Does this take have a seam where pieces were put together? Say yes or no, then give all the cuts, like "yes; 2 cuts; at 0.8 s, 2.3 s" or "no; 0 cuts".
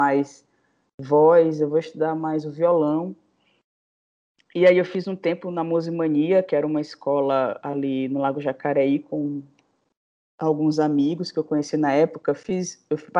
no; 0 cuts